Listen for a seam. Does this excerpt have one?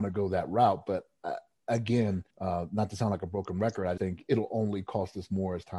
yes; 2 cuts; at 2.3 s, 4.0 s

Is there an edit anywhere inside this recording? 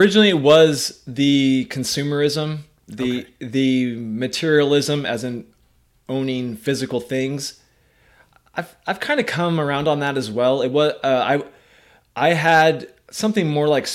no; 0 cuts

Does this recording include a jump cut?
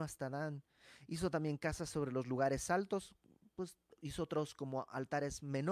no; 0 cuts

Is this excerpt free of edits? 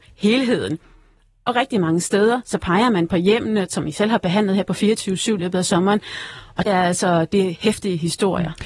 no; 2 cuts; at 5.4 s, 6.7 s

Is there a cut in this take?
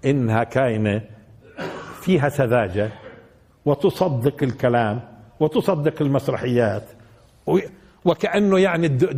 no; 0 cuts

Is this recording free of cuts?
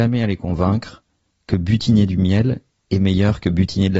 yes; 0 cuts

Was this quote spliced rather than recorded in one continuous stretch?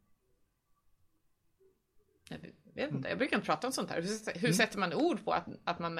no; 0 cuts

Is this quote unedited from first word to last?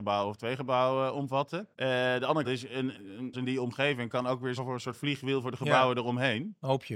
no; 5 cuts; at 1.7 s, 2.4 s, 2.9 s, 3.3 s, 4.6 s

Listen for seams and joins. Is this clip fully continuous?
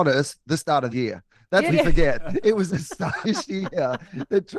no; 4 cuts; at 0.9 s, 1.7 s, 2.7 s, 3.2 s

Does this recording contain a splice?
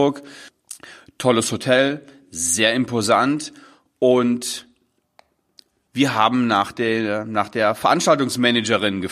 no; 0 cuts

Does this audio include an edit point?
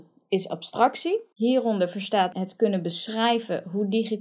yes; 2 cuts; at 1.3 s, 2.3 s

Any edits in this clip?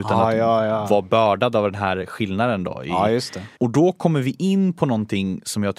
yes; 1 cut; at 3.5 s

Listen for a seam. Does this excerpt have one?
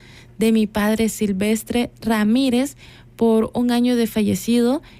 no; 0 cuts

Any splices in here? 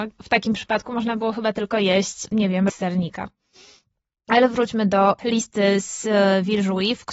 yes; 1 cut; at 2.7 s

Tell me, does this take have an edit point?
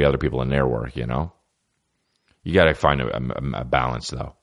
no; 0 cuts

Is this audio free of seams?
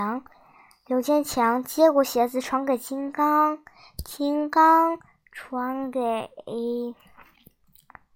yes; 0 cuts

